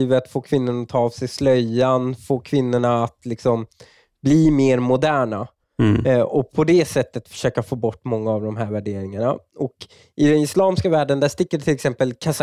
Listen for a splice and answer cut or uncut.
uncut